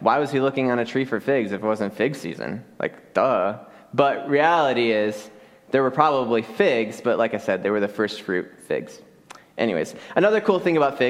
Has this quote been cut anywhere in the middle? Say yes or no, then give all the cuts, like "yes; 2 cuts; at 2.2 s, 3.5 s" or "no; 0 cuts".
no; 0 cuts